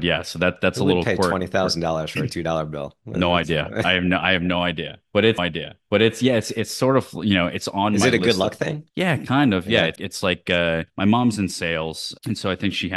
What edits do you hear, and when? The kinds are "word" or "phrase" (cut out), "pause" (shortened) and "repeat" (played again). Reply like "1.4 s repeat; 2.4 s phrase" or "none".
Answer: 3.8 s word; 5.4 s repeat; 8.9 s pause; 10.0 s word; 10.9 s pause